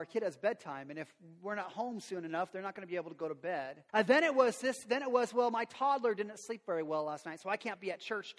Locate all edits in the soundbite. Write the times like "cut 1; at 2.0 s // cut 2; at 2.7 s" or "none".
cut 1; at 3.9 s